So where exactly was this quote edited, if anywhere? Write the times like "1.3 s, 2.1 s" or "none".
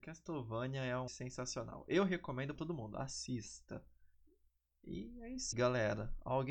1.1 s, 2.6 s, 4.1 s, 5.5 s